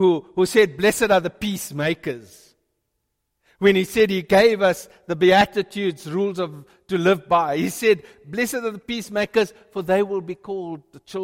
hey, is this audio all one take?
yes; 0 cuts

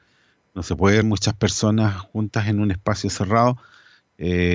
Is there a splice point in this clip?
yes; 1 cut; at 1.0 s

